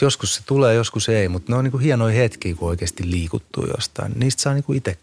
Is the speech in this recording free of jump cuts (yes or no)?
yes